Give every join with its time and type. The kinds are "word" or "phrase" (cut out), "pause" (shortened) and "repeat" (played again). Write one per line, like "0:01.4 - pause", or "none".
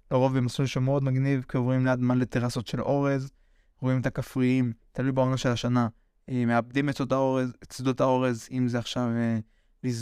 none